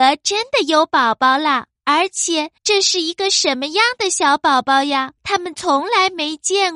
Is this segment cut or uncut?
cut